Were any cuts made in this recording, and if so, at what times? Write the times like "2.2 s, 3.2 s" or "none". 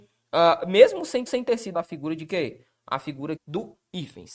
1.3 s, 1.7 s, 3.4 s

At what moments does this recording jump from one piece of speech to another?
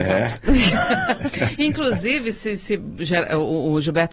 none

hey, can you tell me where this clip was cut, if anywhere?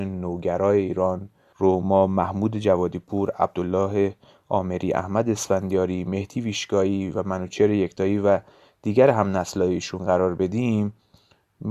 none

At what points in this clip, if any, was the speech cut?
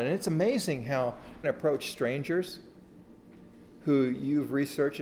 1.4 s

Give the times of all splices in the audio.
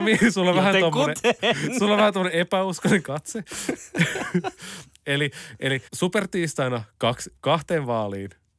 5.9 s, 7.4 s

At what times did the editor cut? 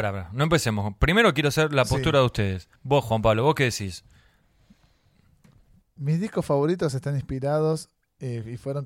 2.8 s

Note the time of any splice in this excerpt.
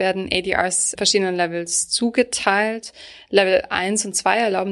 0.9 s

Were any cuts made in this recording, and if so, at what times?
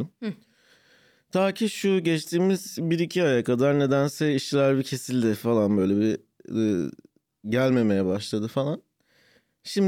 none

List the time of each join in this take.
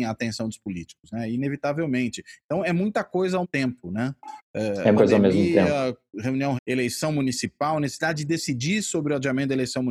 3.4 s, 5.0 s, 6.6 s

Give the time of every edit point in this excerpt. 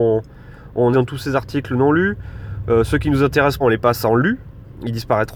0.9 s, 3.6 s

